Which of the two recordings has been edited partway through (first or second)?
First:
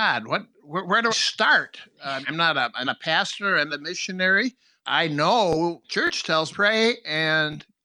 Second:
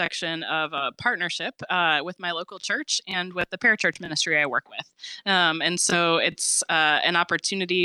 first